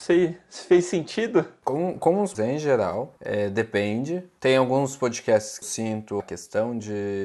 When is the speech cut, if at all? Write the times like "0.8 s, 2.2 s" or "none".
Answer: 2.3 s, 3.2 s, 5.6 s, 6.2 s